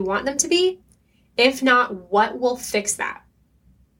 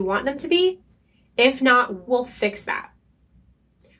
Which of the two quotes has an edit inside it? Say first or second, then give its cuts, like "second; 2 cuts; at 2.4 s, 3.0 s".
second; 1 cut; at 2.1 s